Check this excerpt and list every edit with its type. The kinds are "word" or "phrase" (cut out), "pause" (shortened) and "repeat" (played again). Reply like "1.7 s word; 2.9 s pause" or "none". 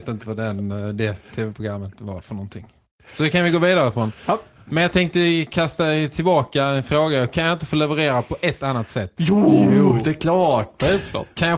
none